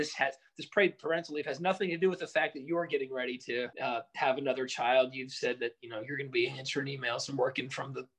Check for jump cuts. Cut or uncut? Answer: cut